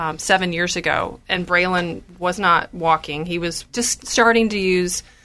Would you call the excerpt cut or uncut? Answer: cut